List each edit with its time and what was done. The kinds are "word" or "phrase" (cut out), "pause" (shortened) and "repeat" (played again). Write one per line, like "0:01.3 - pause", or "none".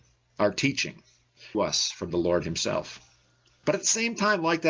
0:01.5 - phrase